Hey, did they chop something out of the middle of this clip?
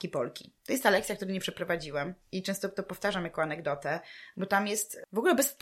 no; 0 cuts

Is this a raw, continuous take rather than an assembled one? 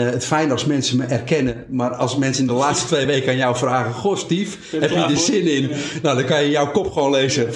yes; 0 cuts

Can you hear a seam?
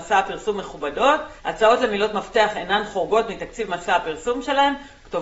yes; 1 cut; at 1.4 s

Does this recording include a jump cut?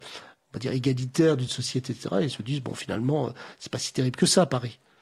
no; 0 cuts

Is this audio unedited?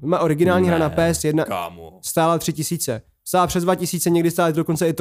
yes; 0 cuts

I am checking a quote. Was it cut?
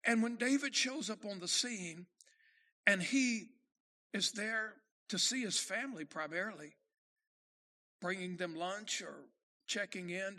no; 0 cuts

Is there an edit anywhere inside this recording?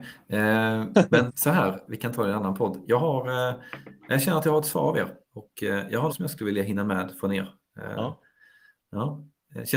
yes; 5 cuts; at 1.3 s, 1.9 s, 4.0 s, 5.2 s, 6.1 s

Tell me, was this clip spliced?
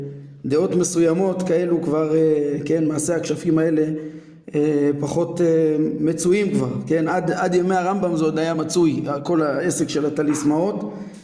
no; 0 cuts

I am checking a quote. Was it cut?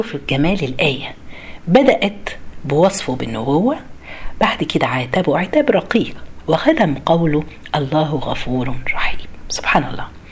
no; 0 cuts

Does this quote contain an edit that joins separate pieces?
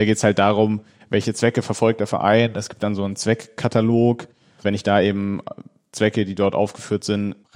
no; 0 cuts

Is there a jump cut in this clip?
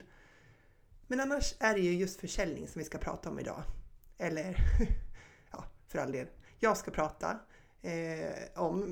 no; 0 cuts

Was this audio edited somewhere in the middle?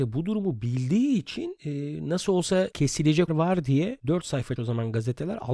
yes; 2 cuts; at 3.3 s, 4.6 s

